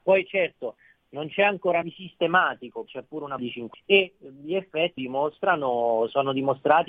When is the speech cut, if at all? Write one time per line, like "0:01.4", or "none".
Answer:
0:01.8
0:02.9
0:03.4
0:03.7
0:05.0